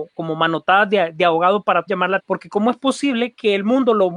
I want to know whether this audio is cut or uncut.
cut